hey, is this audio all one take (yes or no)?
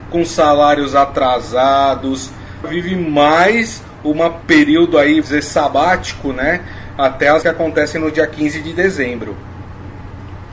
no